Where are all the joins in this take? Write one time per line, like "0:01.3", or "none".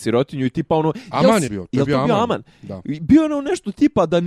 0:01.5